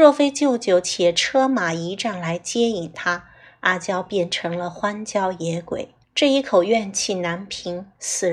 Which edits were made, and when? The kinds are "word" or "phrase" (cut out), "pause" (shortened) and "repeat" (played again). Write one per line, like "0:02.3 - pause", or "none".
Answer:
0:06.0 - pause